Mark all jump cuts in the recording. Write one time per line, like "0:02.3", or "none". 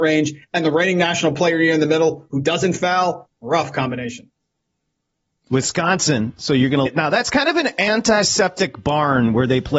0:06.9